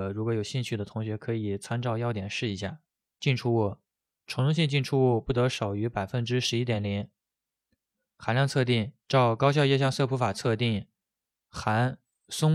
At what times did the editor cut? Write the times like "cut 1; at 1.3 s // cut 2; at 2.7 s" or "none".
cut 1; at 3.0 s // cut 2; at 9.0 s